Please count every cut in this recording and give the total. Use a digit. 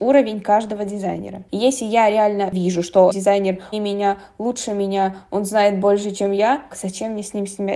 3